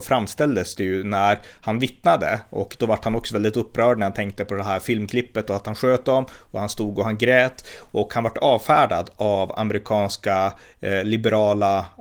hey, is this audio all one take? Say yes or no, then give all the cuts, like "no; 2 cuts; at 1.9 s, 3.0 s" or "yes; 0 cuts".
yes; 0 cuts